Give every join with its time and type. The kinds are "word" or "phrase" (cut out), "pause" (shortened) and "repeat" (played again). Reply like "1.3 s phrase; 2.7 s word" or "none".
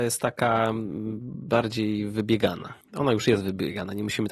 2.8 s pause